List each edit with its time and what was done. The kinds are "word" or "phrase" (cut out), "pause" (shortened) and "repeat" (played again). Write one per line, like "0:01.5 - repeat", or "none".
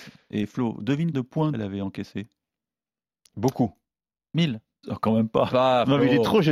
0:01.1 - word
0:01.5 - word
0:04.8 - word
0:05.5 - word